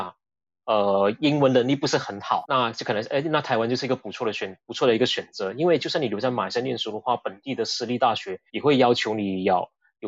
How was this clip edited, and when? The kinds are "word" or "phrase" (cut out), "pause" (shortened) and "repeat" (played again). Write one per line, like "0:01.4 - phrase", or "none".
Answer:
0:02.4 - word
0:04.6 - pause
0:08.5 - pause